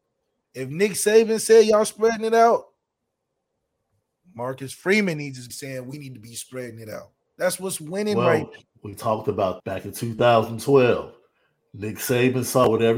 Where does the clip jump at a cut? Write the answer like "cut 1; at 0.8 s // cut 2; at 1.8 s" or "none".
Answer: cut 1; at 5.5 s // cut 2; at 9.6 s